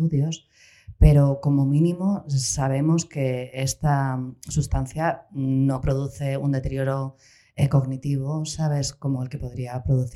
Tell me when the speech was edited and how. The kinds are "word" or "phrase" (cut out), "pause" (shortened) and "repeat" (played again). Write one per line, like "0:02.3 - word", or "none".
none